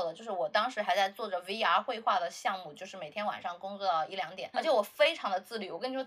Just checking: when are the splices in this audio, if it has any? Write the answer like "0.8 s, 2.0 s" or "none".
4.5 s